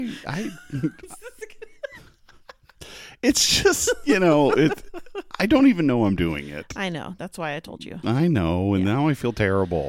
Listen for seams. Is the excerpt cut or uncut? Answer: uncut